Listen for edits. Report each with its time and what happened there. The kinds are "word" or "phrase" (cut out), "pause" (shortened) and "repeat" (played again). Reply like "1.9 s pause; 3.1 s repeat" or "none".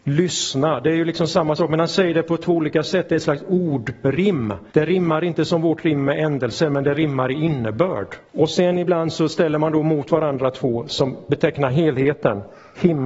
4.7 s pause; 8.3 s pause